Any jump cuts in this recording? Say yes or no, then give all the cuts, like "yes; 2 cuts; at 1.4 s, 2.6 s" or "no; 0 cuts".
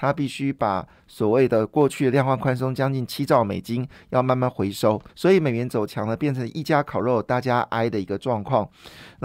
yes; 1 cut; at 5.1 s